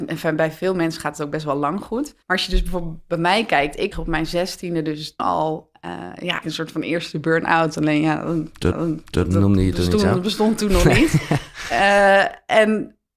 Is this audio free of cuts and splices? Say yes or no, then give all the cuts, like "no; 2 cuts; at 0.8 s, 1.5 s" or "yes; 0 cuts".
no; 5 cuts; at 2.2 s, 3.9 s, 5.2 s, 6.4 s, 8.7 s